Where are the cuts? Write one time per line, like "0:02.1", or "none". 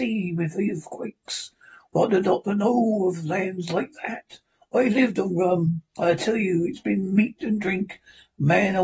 none